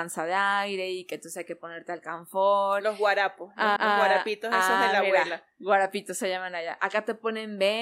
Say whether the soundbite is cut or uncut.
cut